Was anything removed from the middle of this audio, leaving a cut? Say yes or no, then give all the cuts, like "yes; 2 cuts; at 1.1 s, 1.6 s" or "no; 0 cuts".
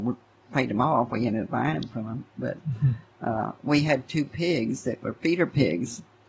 no; 0 cuts